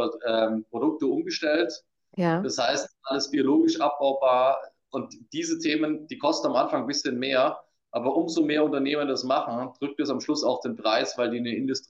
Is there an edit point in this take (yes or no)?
no